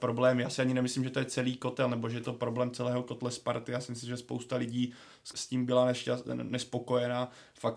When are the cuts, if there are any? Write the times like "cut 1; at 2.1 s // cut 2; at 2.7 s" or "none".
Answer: cut 1; at 5.3 s